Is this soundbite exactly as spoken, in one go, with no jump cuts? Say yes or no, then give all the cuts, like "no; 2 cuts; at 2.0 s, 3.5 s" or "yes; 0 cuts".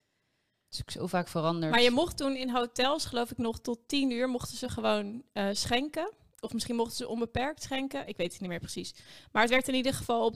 yes; 0 cuts